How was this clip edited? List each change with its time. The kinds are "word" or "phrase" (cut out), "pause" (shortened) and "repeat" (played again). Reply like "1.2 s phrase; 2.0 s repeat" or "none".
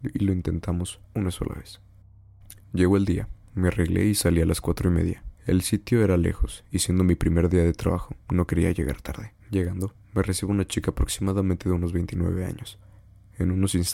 1.0 s pause; 2.6 s pause; 5.4 s pause; 9.4 s pause